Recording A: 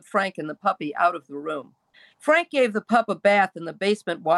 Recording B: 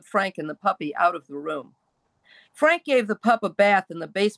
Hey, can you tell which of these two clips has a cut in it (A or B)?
A